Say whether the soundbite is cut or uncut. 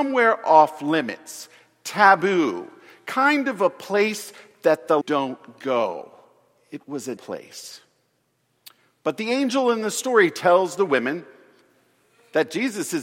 cut